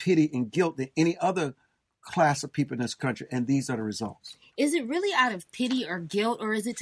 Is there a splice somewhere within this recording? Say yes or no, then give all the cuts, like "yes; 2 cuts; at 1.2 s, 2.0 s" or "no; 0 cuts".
no; 0 cuts